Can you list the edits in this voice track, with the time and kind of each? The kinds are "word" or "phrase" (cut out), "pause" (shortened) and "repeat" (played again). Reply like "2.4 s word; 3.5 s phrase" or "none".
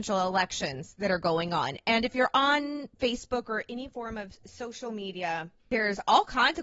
5.6 s pause

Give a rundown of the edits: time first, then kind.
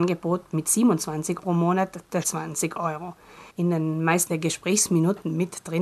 1.4 s word; 2.2 s phrase; 3.5 s pause; 4.3 s phrase

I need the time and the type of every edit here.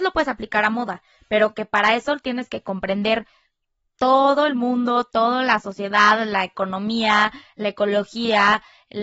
none

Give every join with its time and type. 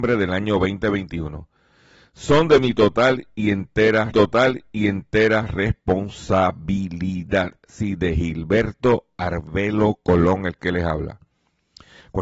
4.1 s repeat

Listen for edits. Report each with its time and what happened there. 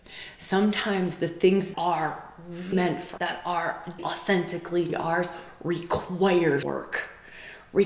1.7 s word; 2.7 s word; 3.2 s word; 4.0 s word; 4.9 s word; 6.6 s word

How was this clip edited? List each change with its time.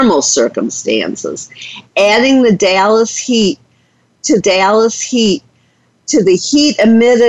4.4 s repeat

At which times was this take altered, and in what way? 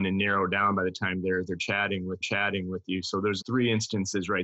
2.2 s repeat; 3.4 s word

